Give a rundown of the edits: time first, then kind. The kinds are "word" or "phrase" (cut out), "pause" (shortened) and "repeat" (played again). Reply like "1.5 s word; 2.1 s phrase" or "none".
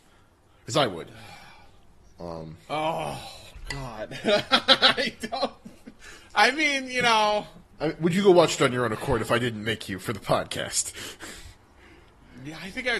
2.6 s pause; 11.6 s pause